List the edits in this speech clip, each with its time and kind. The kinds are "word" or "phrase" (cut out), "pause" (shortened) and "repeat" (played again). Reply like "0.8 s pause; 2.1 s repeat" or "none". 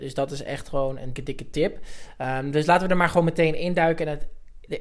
1.2 s word